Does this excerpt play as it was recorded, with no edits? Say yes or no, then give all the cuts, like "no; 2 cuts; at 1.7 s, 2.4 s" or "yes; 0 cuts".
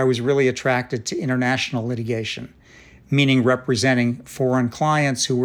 yes; 0 cuts